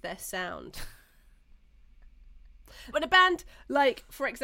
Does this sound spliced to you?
yes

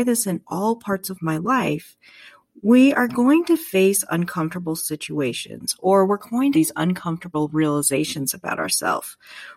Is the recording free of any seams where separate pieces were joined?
no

